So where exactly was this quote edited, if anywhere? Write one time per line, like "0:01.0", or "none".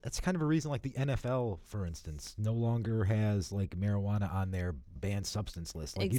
0:05.0

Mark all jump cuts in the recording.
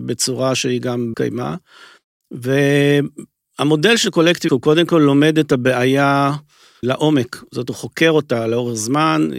0:01.1
0:04.5
0:06.8
0:07.7

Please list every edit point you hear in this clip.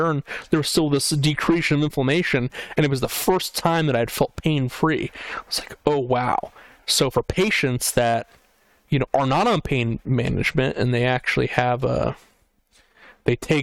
none

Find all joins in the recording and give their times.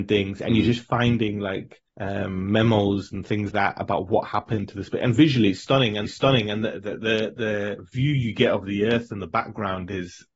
0:01.9
0:03.5
0:06.0

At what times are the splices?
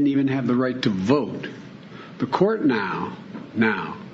none

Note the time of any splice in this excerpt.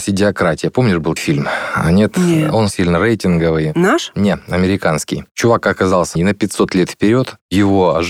0:01.2
0:02.7
0:06.2

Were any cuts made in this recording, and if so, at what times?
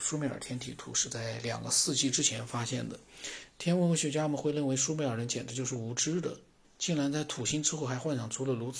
0:06.6

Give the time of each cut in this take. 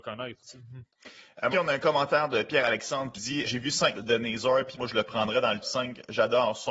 0:01.5
0:03.1
0:03.4
0:03.9
0:04.8
0:05.6

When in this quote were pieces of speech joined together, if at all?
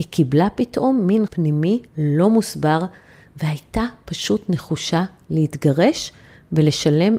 0:01.3
0:01.9

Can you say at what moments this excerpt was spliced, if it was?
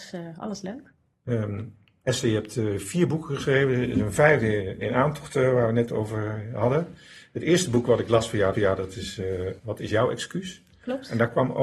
0:04.8
0:08.5

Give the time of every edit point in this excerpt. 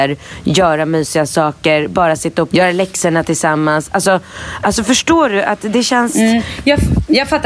0:02.5

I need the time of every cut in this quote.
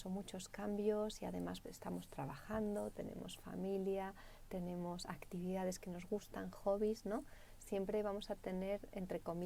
0:01.6

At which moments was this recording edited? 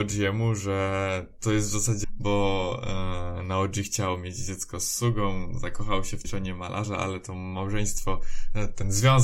0:02.0
0:06.2

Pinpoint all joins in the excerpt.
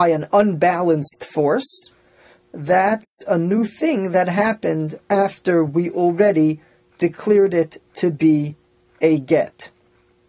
none

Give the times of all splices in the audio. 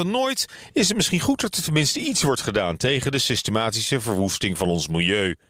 none

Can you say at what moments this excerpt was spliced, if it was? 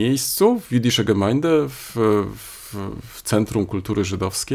none

